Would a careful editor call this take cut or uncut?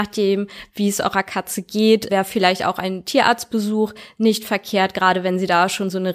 cut